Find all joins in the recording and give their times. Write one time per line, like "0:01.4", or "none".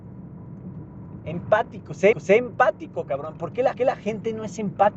0:02.1
0:03.7

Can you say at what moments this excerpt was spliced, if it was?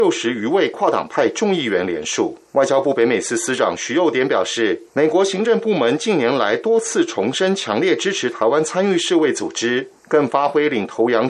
0:02.5
0:04.9
0:10.0

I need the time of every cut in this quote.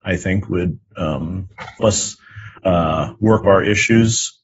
0:01.8
0:02.6
0:03.4

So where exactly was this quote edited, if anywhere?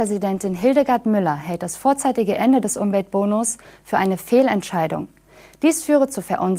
none

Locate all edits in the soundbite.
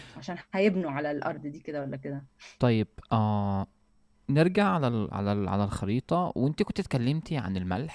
none

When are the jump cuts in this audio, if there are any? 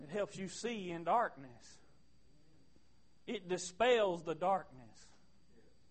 none

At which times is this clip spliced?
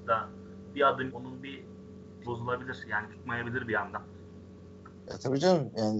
0:01.1
0:02.2
0:03.1

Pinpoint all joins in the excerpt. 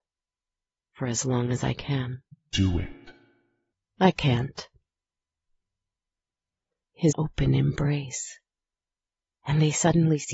0:02.3
0:07.1

